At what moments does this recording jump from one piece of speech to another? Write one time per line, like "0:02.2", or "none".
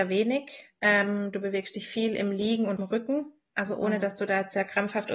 0:02.8